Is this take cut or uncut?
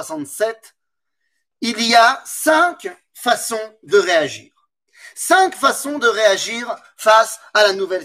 uncut